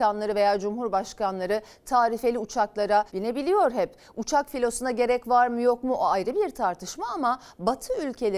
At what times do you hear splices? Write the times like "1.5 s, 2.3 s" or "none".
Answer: 3.1 s